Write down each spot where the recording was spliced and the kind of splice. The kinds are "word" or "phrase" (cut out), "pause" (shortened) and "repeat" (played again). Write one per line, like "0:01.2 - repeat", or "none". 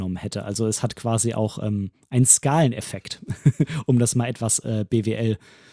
none